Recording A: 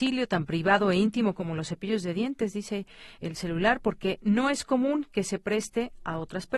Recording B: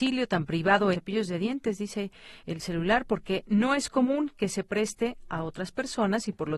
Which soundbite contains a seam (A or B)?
B